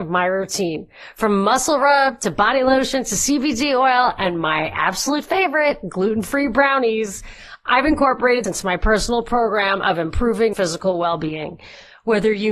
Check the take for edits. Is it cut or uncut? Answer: cut